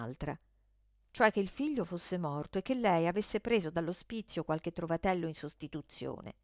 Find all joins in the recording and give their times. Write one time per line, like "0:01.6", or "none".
none